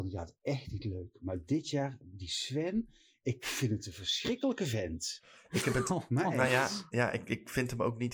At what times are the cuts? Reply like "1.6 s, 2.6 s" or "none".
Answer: none